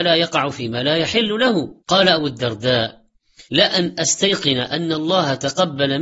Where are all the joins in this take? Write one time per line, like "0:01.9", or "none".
0:01.8
0:03.4